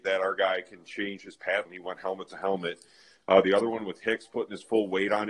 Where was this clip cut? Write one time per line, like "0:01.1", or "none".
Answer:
0:01.7